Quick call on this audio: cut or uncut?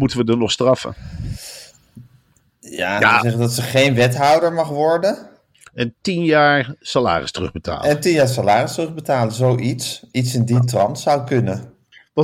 uncut